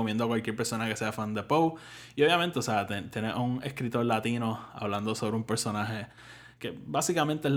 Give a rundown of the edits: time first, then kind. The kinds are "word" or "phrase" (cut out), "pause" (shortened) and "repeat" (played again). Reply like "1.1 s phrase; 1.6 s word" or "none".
6.6 s word